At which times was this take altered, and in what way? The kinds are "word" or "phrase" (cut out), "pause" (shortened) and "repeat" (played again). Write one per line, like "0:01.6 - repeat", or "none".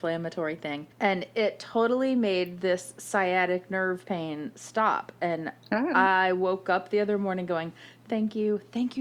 0:00.9 - pause